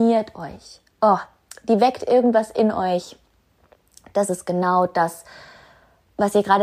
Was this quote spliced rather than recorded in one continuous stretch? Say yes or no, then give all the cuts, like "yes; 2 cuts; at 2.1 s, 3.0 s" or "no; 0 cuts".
no; 0 cuts